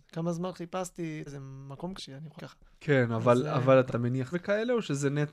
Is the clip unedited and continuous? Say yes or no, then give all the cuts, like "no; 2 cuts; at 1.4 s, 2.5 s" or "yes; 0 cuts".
no; 6 cuts; at 1.3 s, 2.0 s, 2.4 s, 2.7 s, 3.9 s, 4.3 s